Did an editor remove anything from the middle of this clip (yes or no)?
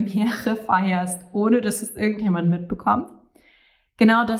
no